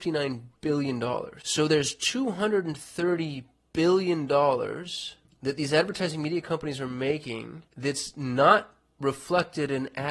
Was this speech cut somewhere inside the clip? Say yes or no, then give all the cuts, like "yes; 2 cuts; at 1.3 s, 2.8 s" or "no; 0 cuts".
yes; 2 cuts; at 3.7 s, 7.7 s